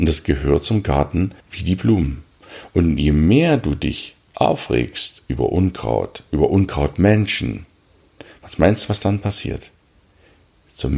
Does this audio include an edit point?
yes; 1 cut; at 1.4 s

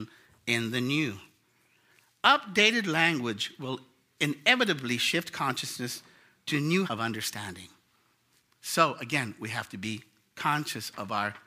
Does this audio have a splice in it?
yes; 1 cut; at 6.9 s

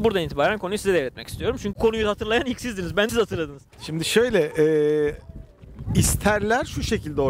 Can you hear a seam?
yes; 3 cuts; at 1.7 s, 3.1 s, 3.7 s

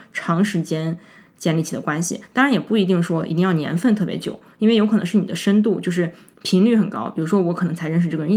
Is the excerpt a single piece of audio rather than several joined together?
yes; 0 cuts

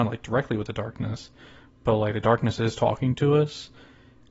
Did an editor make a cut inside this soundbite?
no; 0 cuts

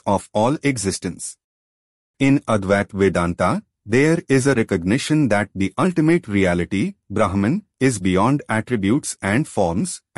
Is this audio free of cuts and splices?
yes; 0 cuts

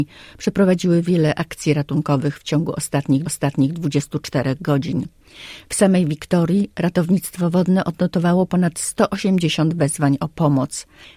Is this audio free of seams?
no; 1 cut; at 3.2 s

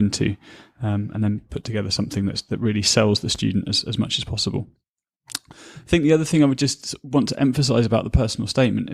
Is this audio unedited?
yes; 0 cuts

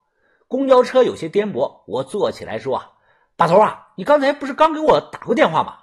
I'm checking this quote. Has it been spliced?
no; 0 cuts

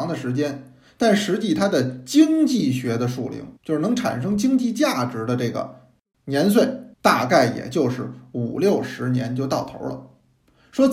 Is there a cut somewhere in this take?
yes; 2 cuts; at 3.6 s, 6.9 s

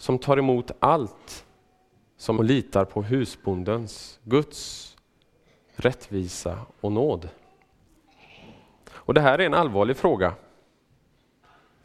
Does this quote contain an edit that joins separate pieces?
yes; 1 cut; at 2.4 s

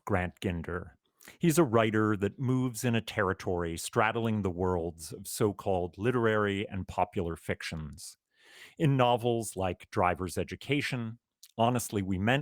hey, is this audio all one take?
yes; 0 cuts

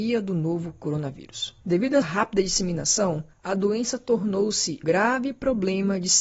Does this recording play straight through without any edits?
no; 4 cuts; at 1.6 s, 2.0 s, 3.3 s, 4.8 s

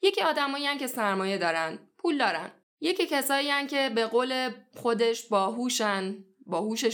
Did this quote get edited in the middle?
yes; 1 cut; at 2.6 s

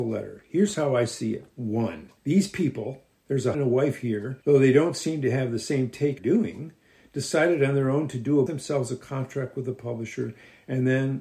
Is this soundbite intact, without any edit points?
no; 5 cuts; at 2.2 s, 3.5 s, 4.4 s, 6.2 s, 8.5 s

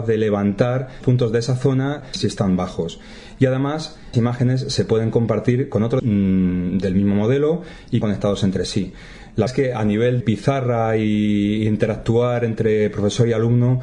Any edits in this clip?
yes; 6 cuts; at 1.0 s, 4.1 s, 6.0 s, 8.0 s, 9.5 s, 10.2 s

